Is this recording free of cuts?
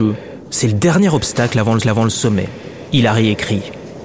no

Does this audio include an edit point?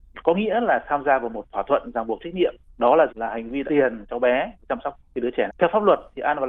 yes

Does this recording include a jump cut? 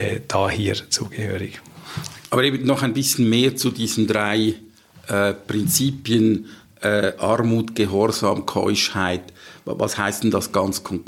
no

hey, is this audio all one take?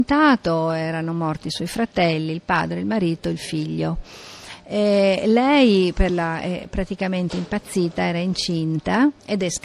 yes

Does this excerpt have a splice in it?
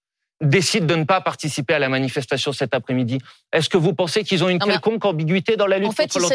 no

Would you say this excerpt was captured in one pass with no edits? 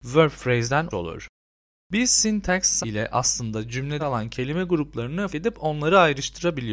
no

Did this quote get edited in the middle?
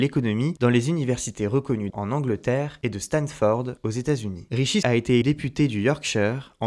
yes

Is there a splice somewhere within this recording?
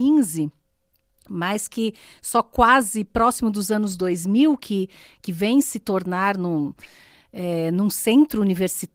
no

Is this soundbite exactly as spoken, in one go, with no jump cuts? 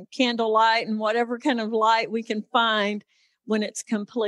yes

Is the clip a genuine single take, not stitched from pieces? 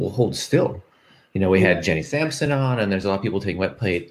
yes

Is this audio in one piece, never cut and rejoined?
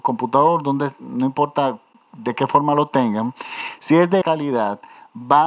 no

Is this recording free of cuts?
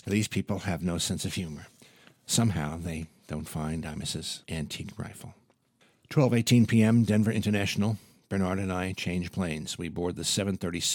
yes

